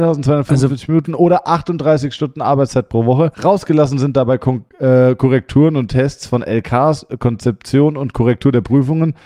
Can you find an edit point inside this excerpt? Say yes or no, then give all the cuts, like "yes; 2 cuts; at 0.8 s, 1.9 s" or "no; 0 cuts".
yes; 1 cut; at 3.3 s